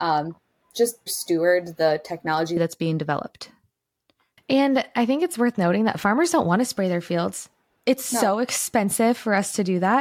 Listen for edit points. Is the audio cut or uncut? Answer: cut